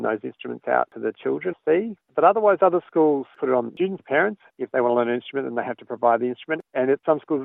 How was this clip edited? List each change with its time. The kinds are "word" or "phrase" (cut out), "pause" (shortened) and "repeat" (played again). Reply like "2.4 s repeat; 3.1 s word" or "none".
1.5 s word; 3.7 s word; 4.0 s word